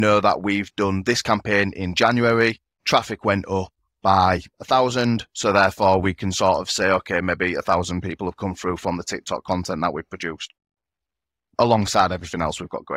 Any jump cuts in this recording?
no; 0 cuts

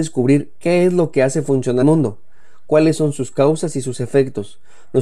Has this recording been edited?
yes; 1 cut; at 1.8 s

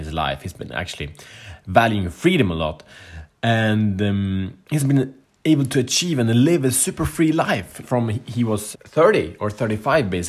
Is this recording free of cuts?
no; 3 cuts; at 4.8 s, 7.8 s, 8.7 s

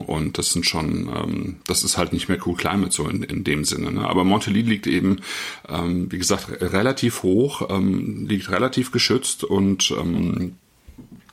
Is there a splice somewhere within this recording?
no; 0 cuts

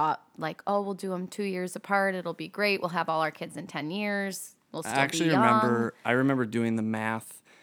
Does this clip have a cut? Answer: no; 0 cuts

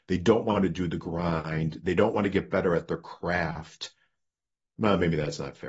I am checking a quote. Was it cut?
no; 0 cuts

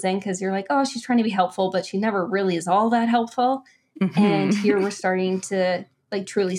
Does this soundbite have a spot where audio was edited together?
no; 0 cuts

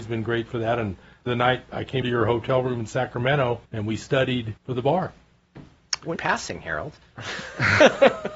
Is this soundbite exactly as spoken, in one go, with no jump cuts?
no; 5 cuts; at 1.3 s, 2.0 s, 3.6 s, 4.6 s, 6.2 s

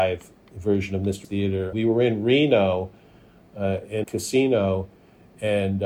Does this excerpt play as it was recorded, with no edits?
no; 3 cuts; at 1.2 s, 1.7 s, 4.0 s

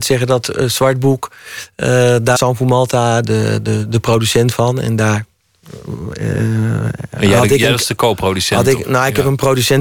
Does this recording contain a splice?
yes; 2 cuts; at 2.4 s, 3.2 s

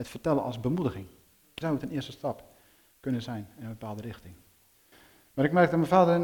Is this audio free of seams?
no; 1 cut; at 1.6 s

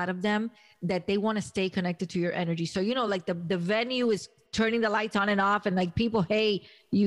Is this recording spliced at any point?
no; 0 cuts

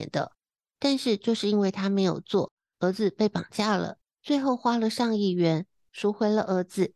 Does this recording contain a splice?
yes; 1 cut; at 4.0 s

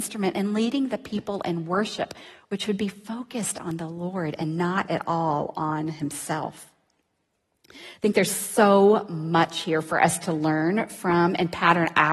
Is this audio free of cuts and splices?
yes; 0 cuts

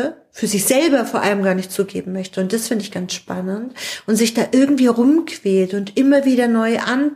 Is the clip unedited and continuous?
yes; 0 cuts

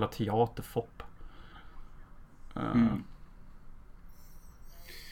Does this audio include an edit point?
no; 0 cuts

